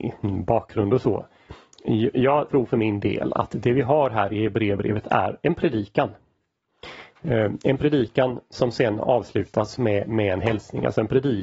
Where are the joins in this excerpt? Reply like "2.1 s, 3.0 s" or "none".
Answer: 2.5 s